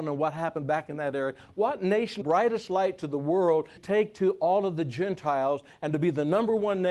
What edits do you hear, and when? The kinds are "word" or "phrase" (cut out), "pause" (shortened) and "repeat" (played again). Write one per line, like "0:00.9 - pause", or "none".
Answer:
0:02.2 - phrase
0:03.8 - word